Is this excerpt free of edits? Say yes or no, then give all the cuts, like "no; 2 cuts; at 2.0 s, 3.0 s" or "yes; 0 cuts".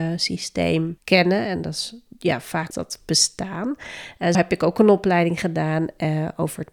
no; 3 cuts; at 1.0 s, 2.7 s, 4.3 s